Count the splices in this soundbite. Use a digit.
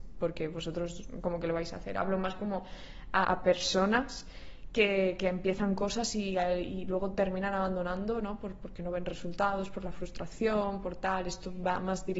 1